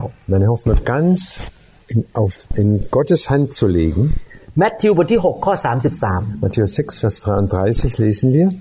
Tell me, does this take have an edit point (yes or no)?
no